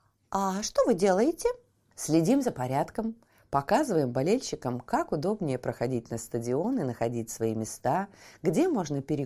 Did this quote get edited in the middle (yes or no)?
no